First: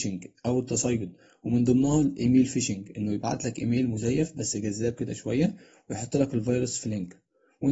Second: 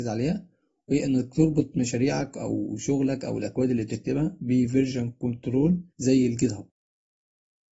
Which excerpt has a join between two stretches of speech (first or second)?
second